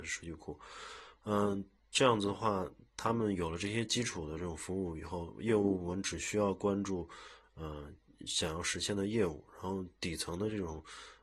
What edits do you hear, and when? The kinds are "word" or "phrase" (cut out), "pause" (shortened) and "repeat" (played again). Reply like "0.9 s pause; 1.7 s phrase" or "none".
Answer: none